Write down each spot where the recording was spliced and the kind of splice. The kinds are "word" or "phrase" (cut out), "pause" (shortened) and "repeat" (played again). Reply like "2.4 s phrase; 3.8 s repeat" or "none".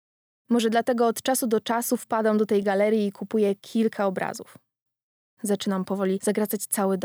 none